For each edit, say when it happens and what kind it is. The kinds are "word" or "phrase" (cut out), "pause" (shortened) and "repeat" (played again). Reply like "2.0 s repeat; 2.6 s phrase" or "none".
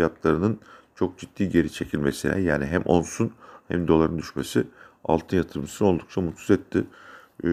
none